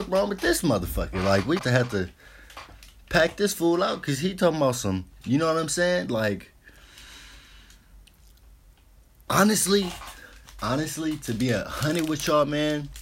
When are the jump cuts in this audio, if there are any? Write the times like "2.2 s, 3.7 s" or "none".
1.6 s

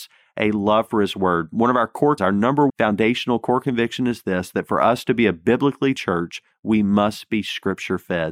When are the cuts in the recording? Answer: 2.2 s, 2.7 s, 6.0 s

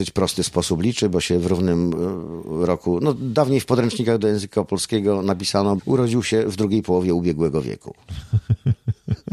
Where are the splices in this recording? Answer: 5.8 s

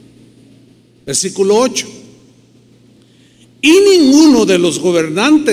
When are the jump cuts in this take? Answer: none

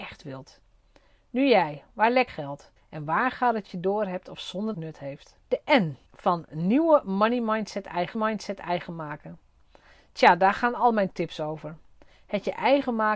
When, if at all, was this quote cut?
2.3 s, 2.8 s, 3.7 s, 4.7 s, 5.4 s, 6.1 s, 8.1 s

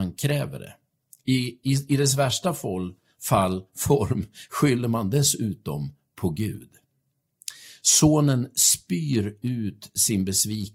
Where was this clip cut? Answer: none

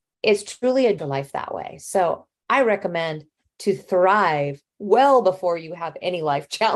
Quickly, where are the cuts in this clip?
1.0 s

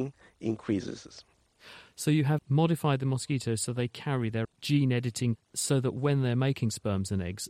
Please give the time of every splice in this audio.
2.4 s, 4.4 s, 5.4 s

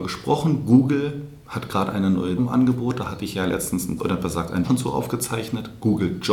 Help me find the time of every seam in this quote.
2.4 s, 4.0 s, 4.6 s

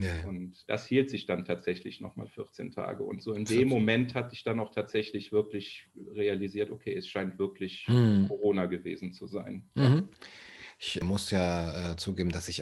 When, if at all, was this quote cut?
none

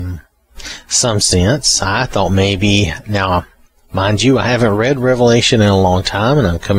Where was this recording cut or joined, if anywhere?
none

